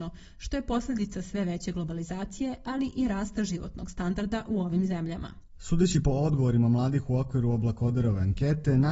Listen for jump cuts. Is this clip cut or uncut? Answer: uncut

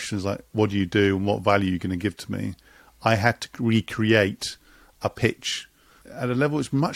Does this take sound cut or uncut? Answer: uncut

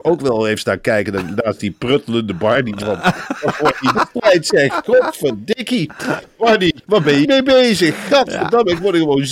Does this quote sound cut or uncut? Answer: cut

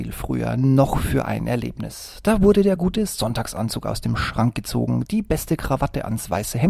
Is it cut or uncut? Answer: uncut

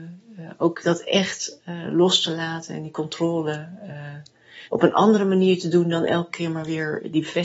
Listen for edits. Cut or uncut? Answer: cut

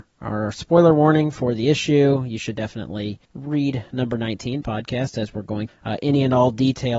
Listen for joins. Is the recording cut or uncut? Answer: cut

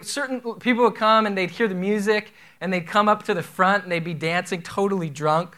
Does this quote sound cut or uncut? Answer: uncut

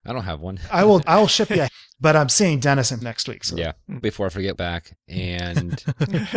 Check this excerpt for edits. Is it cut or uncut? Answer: cut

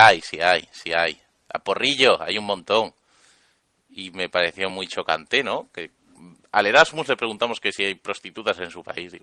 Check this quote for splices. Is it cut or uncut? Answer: uncut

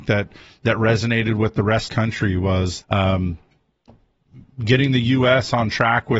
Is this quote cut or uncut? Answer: cut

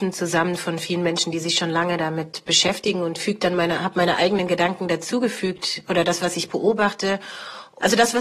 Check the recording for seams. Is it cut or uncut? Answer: uncut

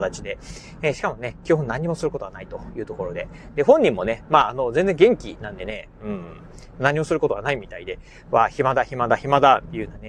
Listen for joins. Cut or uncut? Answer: uncut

